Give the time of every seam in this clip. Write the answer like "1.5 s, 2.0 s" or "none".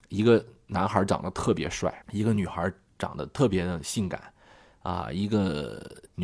2.0 s

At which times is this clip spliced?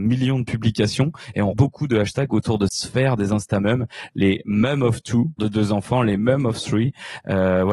1.5 s, 2.7 s, 5.4 s

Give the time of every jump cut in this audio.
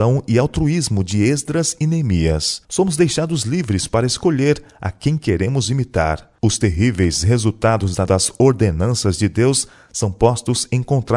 2.6 s, 6.4 s, 8.1 s

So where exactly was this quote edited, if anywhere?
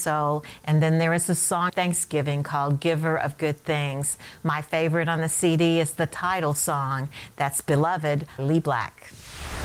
1.7 s, 8.4 s

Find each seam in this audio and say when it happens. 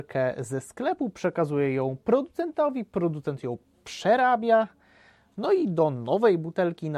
none

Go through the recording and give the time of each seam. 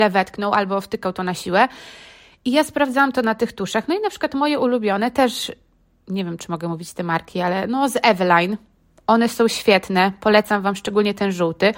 none

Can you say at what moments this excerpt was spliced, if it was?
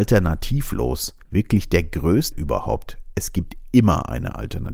1.2 s, 2.3 s

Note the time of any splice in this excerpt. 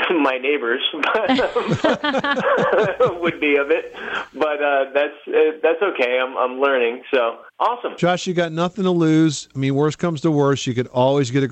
7.5 s

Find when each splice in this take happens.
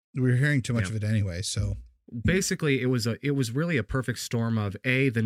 none

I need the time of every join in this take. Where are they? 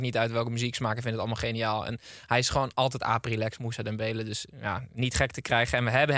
none

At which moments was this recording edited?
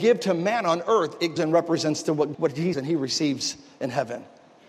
1.4 s, 2.3 s, 2.7 s

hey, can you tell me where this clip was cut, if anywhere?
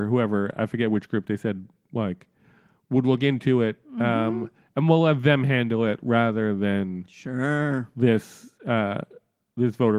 none

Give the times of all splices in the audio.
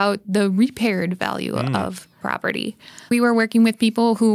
2.2 s, 3.1 s

